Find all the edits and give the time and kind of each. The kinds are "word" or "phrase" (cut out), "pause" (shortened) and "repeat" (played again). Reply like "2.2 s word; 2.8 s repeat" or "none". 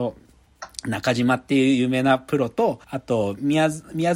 2.8 s pause

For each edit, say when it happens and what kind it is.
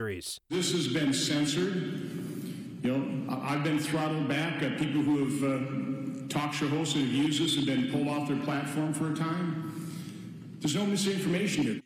none

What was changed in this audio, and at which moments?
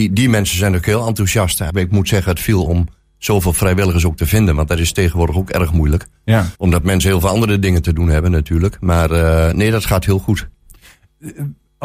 1.7 s word; 2.7 s phrase; 6.5 s pause

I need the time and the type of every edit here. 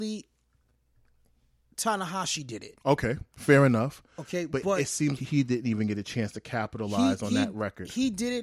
2.8 s pause; 5.2 s word

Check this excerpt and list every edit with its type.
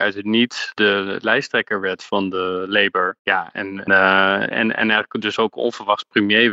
3.2 s pause; 3.9 s word; 4.5 s word

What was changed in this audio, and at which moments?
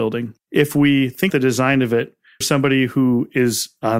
1.3 s word; 2.4 s word

